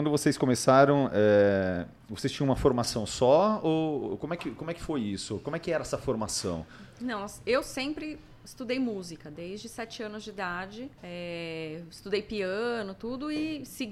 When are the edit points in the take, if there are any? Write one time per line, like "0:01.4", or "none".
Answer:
0:11.0